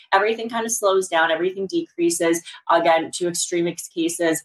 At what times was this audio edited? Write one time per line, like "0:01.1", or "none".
none